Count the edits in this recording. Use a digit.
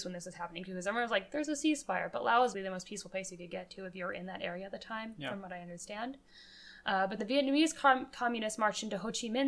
2